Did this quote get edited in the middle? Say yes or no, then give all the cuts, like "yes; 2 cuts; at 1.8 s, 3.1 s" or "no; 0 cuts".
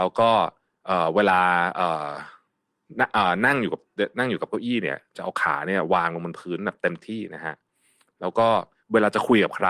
no; 0 cuts